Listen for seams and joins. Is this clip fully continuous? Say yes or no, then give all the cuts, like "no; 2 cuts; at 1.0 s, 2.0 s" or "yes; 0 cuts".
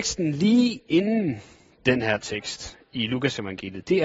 yes; 0 cuts